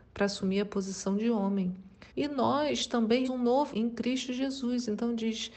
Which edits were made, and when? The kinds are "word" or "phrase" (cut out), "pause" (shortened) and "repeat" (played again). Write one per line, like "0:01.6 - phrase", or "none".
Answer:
0:02.1 - pause
0:03.2 - word
0:03.7 - word